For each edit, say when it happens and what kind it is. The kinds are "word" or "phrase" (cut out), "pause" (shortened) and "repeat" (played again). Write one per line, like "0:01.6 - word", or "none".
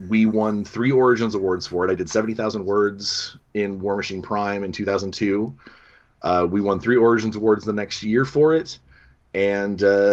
none